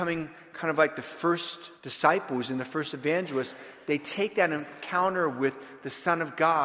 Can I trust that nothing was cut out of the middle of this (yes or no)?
no